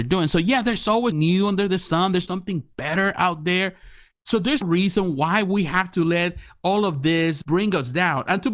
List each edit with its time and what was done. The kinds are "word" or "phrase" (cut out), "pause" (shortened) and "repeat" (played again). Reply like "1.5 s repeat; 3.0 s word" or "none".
1.1 s word; 2.3 s word; 4.6 s word; 7.4 s word